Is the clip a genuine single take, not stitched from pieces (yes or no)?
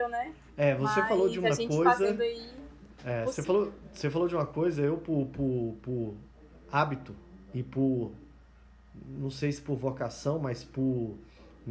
yes